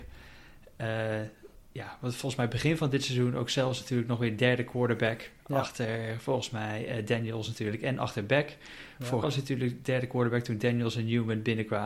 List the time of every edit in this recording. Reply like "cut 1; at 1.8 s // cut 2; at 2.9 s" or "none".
cut 1; at 9.2 s